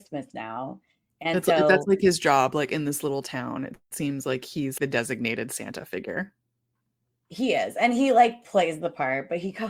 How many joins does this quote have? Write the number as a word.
one